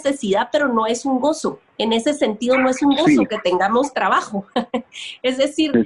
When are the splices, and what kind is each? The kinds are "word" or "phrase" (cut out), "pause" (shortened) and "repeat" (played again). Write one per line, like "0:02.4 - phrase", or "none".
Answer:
0:01.7 - pause

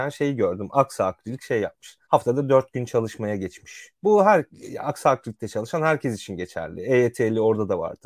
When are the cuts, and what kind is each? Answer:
0:02.0 - pause

